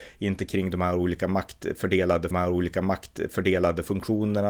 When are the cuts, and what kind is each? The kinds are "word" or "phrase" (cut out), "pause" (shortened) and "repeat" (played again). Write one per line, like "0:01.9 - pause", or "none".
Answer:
0:02.3 - repeat